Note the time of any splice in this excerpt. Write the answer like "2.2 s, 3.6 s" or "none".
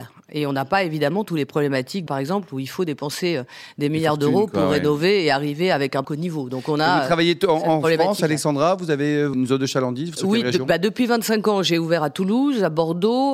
2.1 s, 6.0 s, 9.3 s, 10.2 s